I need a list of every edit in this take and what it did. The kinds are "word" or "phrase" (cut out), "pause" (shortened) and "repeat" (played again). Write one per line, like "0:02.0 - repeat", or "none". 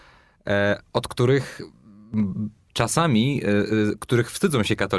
none

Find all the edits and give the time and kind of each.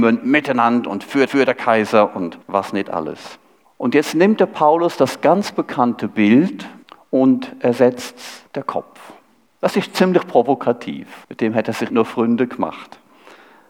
0:01.3 - repeat
0:02.4 - pause
0:03.6 - pause
0:06.8 - pause
0:08.5 - pause
0:09.4 - pause
0:11.2 - pause
0:11.9 - word

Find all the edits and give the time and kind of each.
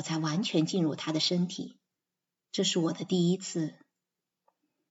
0:02.0 - pause

